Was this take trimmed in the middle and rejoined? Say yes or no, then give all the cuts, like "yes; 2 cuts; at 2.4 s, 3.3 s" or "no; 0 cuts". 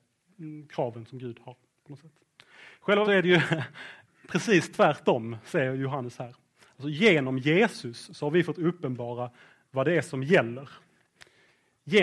yes; 1 cut; at 3.0 s